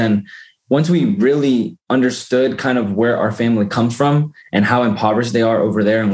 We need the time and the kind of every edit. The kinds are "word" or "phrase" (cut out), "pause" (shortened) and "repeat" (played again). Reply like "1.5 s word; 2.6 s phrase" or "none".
none